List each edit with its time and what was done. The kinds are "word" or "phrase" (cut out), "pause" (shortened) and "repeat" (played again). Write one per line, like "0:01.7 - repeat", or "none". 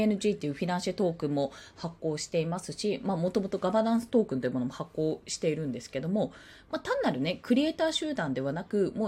none